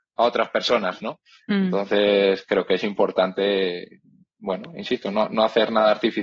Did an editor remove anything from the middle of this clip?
no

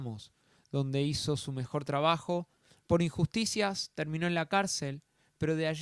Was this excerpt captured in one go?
yes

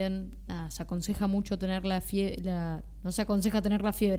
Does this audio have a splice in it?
no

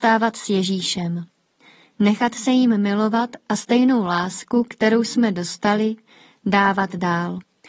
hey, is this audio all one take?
yes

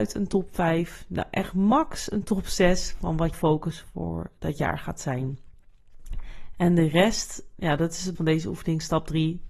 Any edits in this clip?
yes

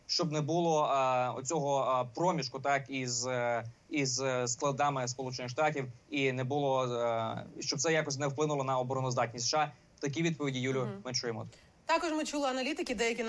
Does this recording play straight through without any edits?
yes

